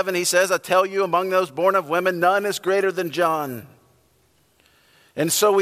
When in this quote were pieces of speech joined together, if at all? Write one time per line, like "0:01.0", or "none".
none